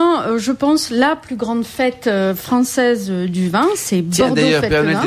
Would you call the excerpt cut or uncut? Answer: uncut